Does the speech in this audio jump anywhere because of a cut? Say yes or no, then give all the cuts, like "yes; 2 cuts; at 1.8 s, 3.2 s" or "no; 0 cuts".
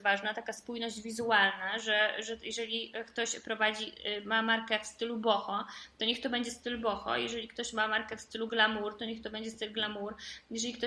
no; 0 cuts